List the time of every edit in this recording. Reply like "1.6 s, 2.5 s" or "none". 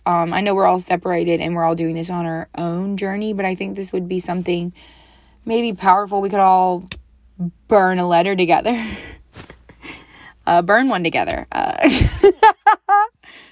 7.6 s

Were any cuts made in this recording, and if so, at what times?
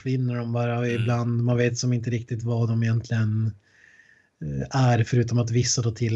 none

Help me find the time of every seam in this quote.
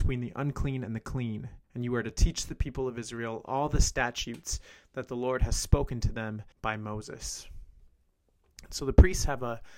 1.6 s, 6.5 s

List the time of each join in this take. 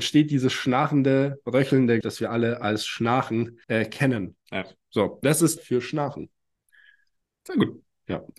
2.0 s, 3.6 s, 5.2 s, 5.6 s

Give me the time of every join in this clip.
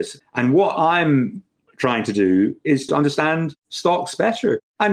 2.9 s

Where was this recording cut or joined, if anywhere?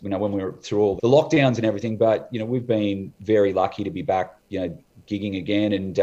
1.0 s

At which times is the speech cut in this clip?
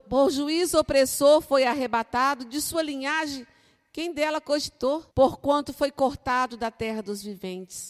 5.1 s

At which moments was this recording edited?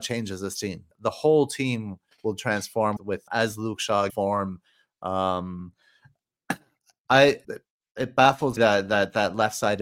0.9 s, 3.0 s, 3.3 s, 4.1 s, 7.4 s, 8.6 s

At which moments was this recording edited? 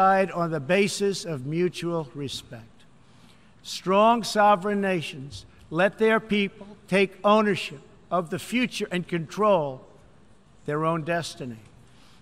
none

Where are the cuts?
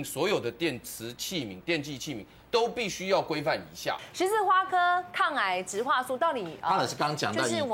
none

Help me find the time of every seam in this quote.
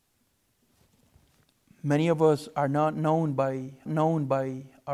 3.9 s

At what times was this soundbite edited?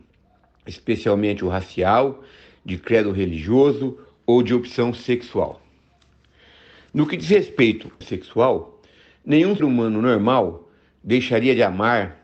8.0 s, 9.6 s

